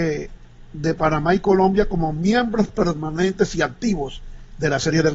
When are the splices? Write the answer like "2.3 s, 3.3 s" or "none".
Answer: none